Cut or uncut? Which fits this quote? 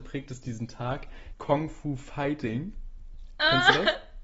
cut